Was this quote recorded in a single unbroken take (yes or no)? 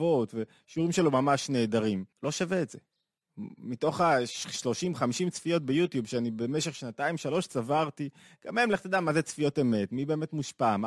no